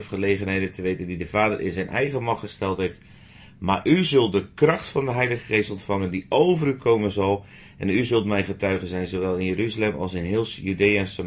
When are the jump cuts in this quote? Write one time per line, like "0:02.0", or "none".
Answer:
none

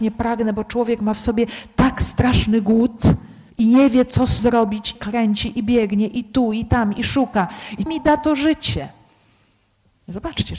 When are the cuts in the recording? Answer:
0:03.5
0:04.4
0:04.9
0:07.9

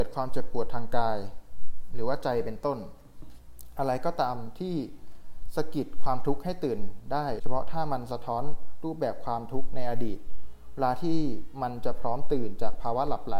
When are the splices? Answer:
0:07.4

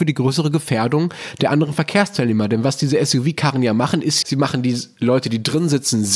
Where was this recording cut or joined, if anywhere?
0:04.2

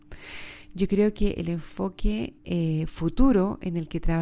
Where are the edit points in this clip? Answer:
0:02.4

